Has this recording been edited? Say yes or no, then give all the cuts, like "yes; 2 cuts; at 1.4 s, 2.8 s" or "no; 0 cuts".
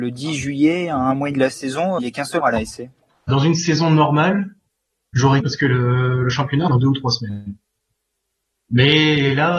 yes; 6 cuts; at 1.3 s, 2.0 s, 2.4 s, 3.3 s, 5.4 s, 6.7 s